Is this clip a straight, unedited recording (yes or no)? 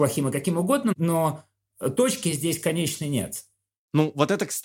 yes